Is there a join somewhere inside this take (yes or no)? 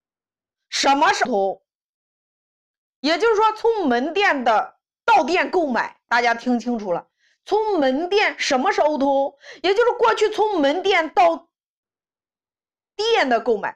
yes